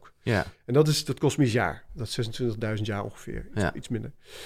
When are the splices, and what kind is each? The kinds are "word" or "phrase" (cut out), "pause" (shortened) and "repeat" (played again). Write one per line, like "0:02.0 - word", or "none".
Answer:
none